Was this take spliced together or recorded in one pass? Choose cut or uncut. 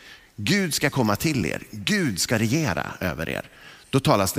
uncut